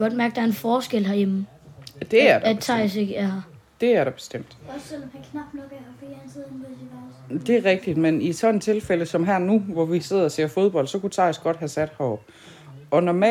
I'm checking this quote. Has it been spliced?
no; 0 cuts

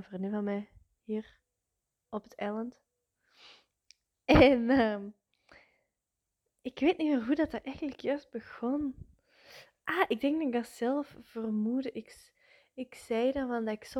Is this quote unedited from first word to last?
yes; 0 cuts

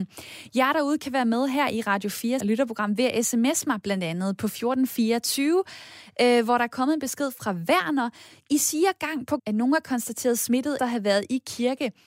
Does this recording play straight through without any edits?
no; 3 cuts; at 2.4 s, 9.4 s, 10.8 s

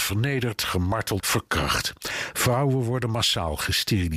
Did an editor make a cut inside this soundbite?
yes; 1 cut; at 1.2 s

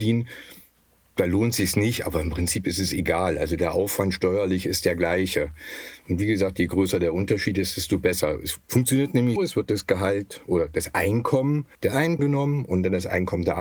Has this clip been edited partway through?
yes; 4 cuts; at 8.6 s, 9.4 s, 11.7 s, 12.2 s

